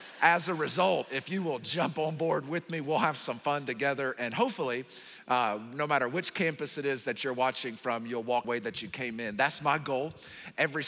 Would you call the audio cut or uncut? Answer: cut